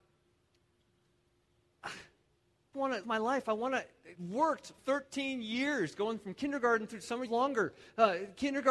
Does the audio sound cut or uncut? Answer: cut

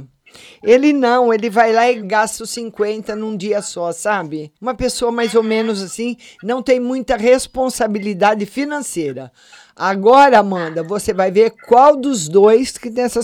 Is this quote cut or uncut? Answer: cut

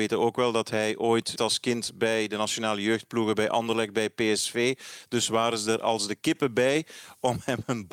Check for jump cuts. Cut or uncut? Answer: cut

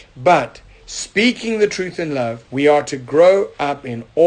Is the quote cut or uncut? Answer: cut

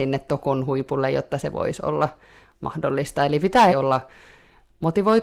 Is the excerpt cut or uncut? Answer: cut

